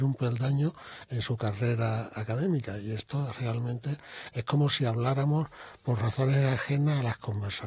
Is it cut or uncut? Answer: uncut